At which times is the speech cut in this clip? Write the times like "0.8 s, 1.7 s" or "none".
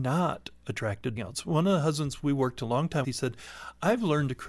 1.2 s, 3.0 s